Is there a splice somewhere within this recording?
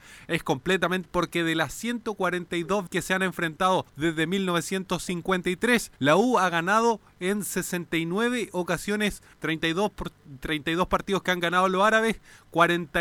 yes; 5 cuts; at 1.1 s, 2.9 s, 3.9 s, 6.0 s, 9.3 s

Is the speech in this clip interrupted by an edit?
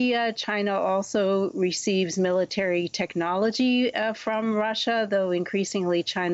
no; 0 cuts

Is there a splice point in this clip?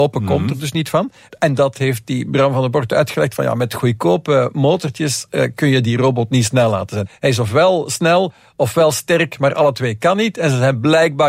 no; 0 cuts

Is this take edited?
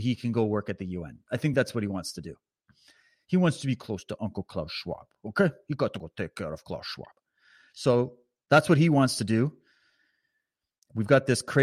no; 0 cuts

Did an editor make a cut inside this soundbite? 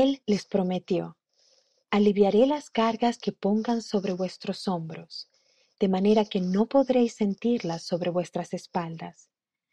no; 0 cuts

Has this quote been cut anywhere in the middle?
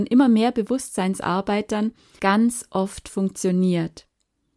yes; 1 cut; at 2.2 s

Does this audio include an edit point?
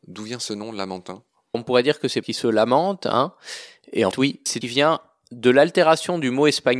yes; 4 cuts; at 1.5 s, 2.2 s, 4.1 s, 4.6 s

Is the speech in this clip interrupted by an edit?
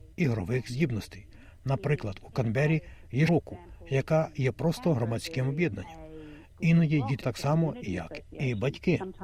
yes; 2 cuts; at 3.3 s, 7.2 s

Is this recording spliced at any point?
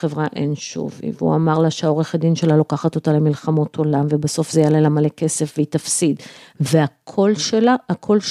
no; 0 cuts

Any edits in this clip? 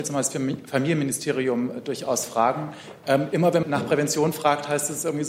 yes; 1 cut; at 3.6 s

